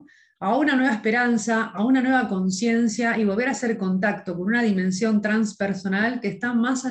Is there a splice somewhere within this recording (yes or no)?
no